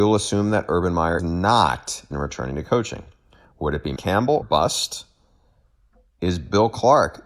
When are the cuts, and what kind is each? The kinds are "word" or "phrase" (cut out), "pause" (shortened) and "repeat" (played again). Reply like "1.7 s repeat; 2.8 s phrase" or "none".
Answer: 1.2 s word; 2.1 s word; 4.0 s word; 4.4 s word